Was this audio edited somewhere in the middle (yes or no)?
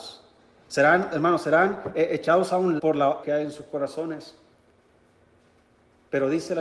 yes